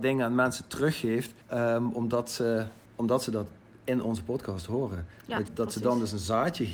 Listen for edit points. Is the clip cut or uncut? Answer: cut